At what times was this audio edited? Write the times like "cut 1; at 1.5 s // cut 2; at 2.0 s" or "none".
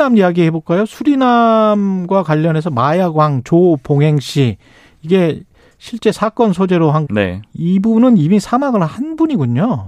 cut 1; at 7.1 s